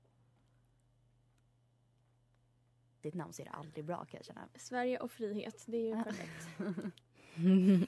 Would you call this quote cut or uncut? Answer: uncut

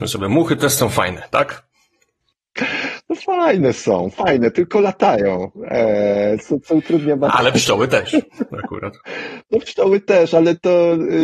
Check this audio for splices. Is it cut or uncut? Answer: uncut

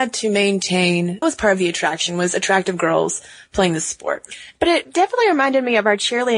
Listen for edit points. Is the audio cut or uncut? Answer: cut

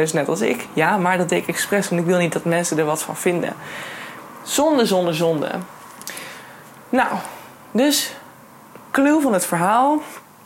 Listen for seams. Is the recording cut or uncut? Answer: uncut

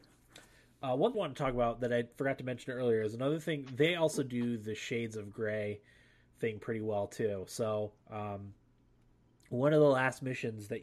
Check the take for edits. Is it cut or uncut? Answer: cut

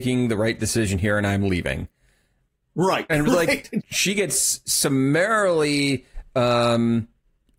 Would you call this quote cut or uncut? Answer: cut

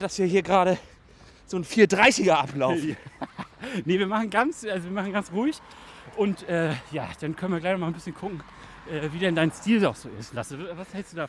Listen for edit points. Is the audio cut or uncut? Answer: uncut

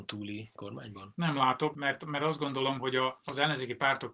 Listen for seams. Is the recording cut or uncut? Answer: uncut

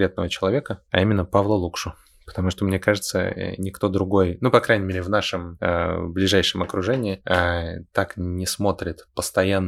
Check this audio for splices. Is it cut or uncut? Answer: uncut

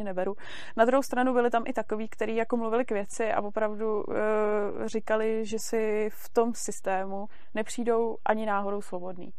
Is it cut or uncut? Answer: uncut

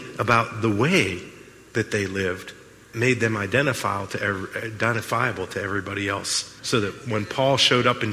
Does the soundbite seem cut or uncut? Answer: cut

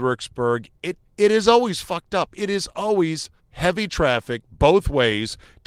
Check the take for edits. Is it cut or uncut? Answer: cut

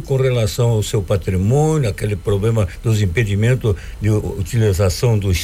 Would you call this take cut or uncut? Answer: uncut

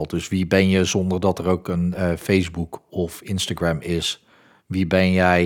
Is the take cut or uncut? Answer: uncut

